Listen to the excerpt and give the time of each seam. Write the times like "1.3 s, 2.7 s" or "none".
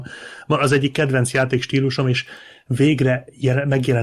none